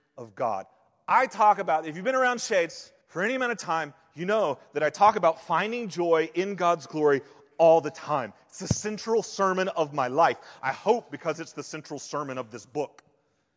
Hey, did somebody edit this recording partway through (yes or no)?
yes